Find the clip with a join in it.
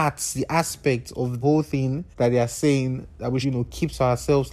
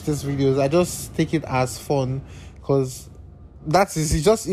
first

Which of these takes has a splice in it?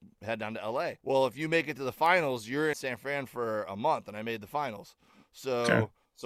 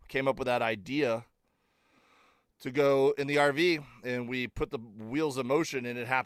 first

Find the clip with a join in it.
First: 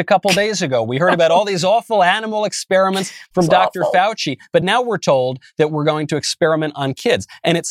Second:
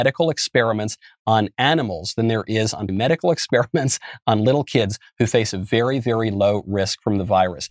second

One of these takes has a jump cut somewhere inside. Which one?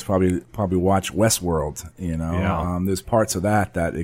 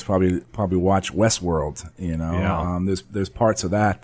first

